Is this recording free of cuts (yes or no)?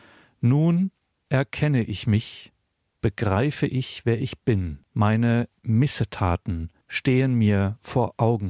no